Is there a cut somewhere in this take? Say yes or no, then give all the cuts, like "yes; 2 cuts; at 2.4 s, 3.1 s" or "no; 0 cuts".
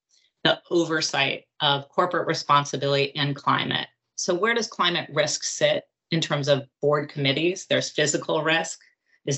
no; 0 cuts